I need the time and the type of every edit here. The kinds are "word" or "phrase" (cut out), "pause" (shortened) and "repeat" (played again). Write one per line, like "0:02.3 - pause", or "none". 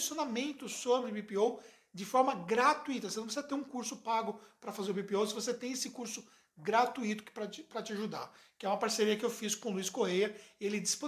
none